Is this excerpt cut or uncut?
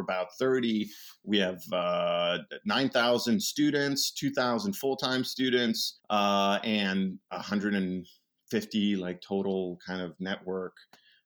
cut